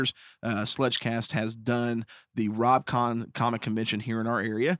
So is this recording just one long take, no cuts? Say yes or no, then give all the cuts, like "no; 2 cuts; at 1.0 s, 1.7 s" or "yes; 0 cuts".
yes; 0 cuts